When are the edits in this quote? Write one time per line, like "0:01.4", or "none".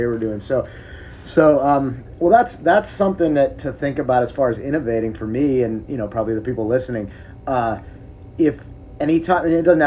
none

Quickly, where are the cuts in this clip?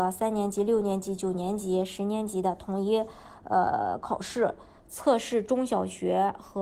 none

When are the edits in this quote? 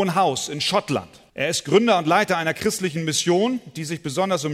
0:01.3

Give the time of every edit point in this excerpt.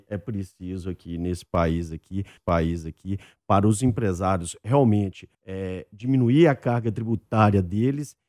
0:02.4
0:05.3

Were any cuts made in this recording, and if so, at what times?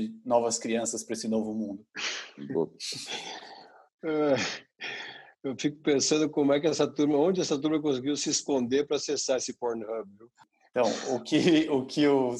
none

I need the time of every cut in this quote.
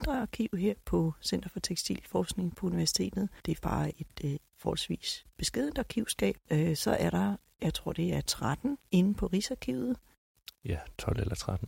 0:03.6
0:03.9
0:04.4
0:08.9

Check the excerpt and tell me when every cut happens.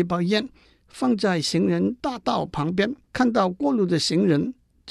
0:03.0

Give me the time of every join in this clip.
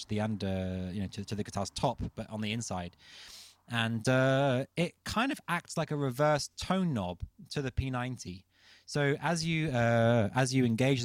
none

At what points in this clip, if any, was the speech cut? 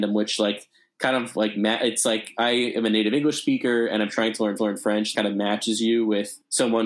0:04.6
0:05.1

